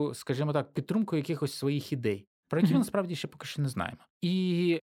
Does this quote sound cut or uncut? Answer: uncut